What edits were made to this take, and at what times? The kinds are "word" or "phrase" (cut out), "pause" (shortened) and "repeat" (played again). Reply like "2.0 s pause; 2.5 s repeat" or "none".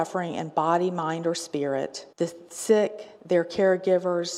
2.1 s pause; 3.2 s pause